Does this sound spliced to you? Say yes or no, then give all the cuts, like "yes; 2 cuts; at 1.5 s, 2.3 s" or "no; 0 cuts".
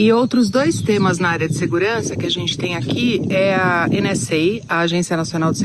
no; 0 cuts